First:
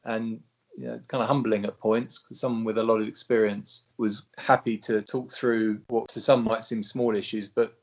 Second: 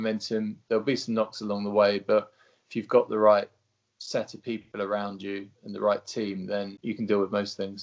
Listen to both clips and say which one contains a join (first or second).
first